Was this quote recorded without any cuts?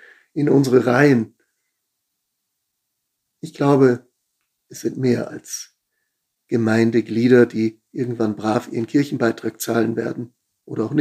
yes; 0 cuts

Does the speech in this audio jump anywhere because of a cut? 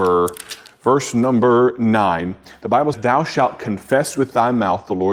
yes; 1 cut; at 2.9 s

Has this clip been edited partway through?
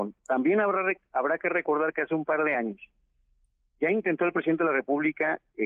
no; 0 cuts

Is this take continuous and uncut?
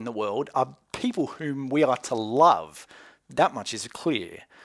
yes; 0 cuts

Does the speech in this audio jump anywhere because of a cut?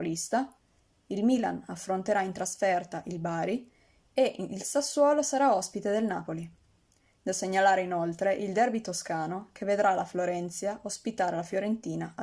no; 0 cuts

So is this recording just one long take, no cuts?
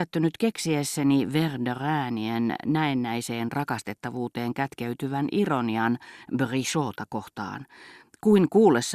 yes; 0 cuts

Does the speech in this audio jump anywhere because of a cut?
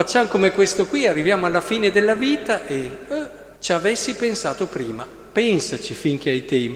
yes; 1 cut; at 3.6 s

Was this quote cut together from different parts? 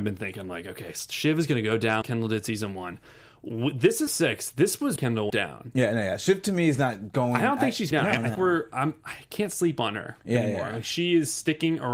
yes; 6 cuts; at 2.0 s, 4.1 s, 5.0 s, 5.3 s, 7.9 s, 8.3 s

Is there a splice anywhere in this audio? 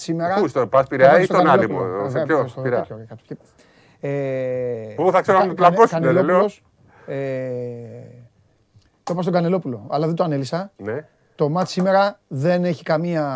no; 0 cuts

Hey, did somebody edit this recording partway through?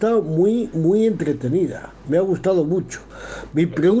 no; 0 cuts

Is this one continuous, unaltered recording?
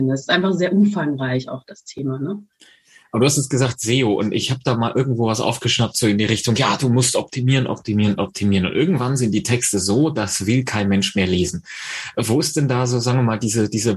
yes; 0 cuts

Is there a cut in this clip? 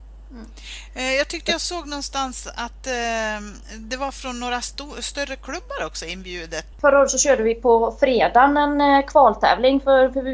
no; 0 cuts

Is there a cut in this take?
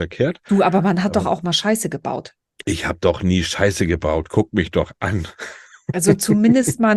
no; 0 cuts

